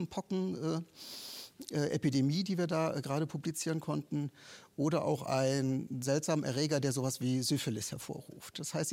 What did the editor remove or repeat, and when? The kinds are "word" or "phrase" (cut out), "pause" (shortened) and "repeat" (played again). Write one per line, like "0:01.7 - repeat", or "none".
none